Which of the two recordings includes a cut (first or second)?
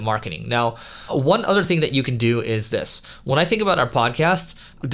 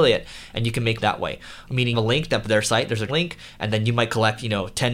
second